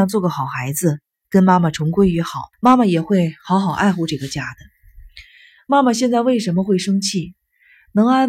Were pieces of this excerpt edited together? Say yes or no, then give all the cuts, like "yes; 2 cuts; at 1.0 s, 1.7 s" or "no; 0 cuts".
yes; 1 cut; at 2.5 s